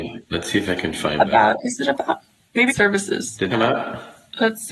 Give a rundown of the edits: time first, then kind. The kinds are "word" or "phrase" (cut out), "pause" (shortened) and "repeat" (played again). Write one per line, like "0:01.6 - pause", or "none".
0:02.7 - word
0:03.5 - word

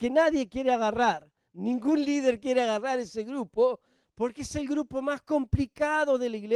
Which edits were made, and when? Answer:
none

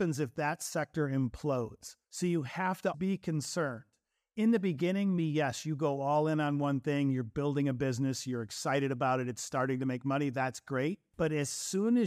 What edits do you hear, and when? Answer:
0:02.0 - pause
0:02.9 - word
0:05.2 - word

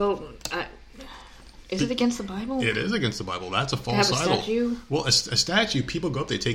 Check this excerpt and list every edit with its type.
none

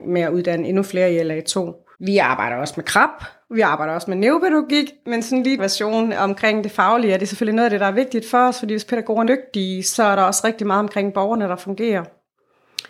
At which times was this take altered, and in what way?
0:01.9 - pause
0:05.6 - phrase
0:09.2 - word

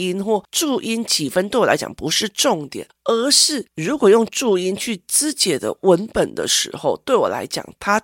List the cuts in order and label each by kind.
0:03.7 - pause

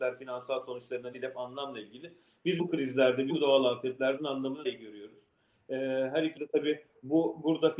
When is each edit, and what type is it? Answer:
0:01.1 - word
0:02.6 - word
0:03.3 - word
0:04.2 - word
0:04.6 - word
0:06.4 - word

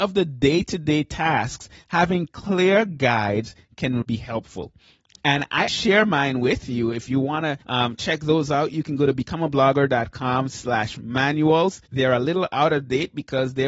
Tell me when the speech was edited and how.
0:04.0 - word
0:05.7 - word
0:07.6 - pause
0:11.9 - pause

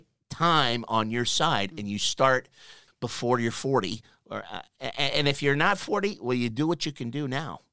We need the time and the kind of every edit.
none

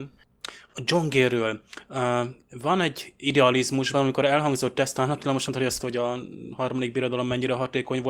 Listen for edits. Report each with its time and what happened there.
0:03.9 - phrase
0:05.5 - word
0:05.8 - phrase

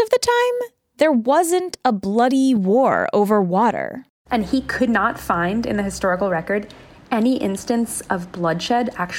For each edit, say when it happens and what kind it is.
none

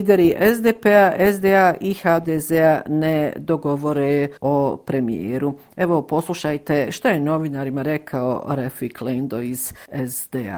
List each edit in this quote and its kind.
0:04.4 - pause

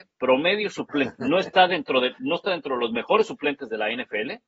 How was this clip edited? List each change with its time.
none

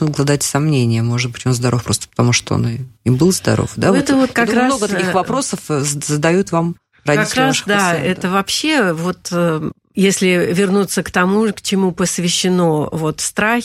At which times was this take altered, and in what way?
none

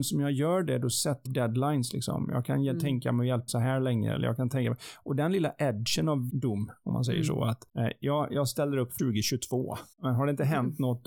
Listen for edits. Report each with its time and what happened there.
0:01.3 - word
0:03.5 - word
0:06.3 - word
0:07.7 - pause
0:09.0 - phrase
0:09.9 - pause

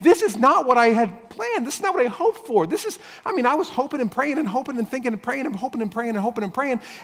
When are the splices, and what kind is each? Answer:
none

